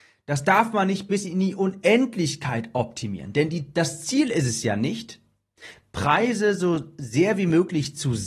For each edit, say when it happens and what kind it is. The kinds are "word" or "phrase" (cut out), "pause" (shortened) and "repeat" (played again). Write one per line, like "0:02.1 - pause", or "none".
none